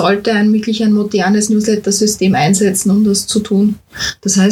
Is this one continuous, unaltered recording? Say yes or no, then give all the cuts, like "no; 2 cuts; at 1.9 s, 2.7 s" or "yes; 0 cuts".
yes; 0 cuts